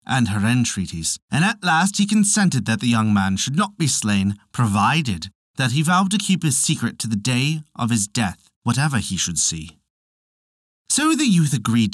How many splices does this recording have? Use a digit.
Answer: 2